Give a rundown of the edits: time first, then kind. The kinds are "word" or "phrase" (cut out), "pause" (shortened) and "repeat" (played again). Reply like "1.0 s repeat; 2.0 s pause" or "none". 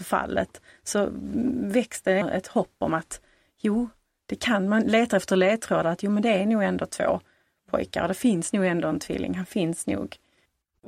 2.2 s word